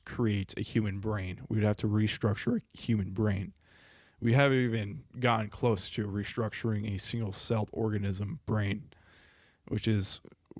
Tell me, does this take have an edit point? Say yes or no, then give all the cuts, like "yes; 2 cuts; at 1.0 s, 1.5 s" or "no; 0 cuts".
no; 0 cuts